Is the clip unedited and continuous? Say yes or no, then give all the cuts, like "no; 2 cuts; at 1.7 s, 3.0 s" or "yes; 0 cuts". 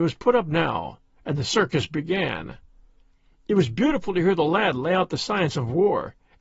yes; 0 cuts